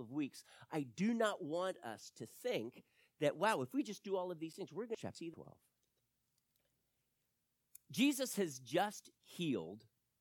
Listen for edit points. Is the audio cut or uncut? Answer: uncut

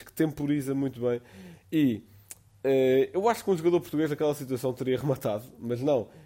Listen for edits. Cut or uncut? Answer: uncut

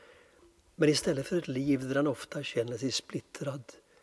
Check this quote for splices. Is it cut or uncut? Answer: uncut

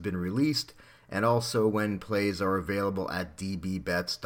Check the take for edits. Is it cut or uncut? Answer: uncut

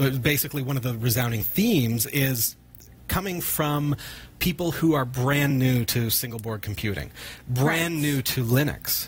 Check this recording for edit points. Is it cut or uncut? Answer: uncut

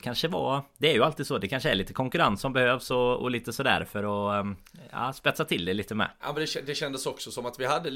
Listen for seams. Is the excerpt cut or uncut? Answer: uncut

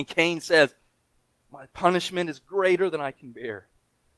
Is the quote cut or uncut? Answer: uncut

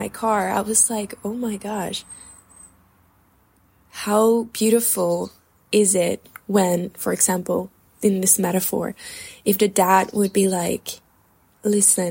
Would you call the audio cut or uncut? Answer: uncut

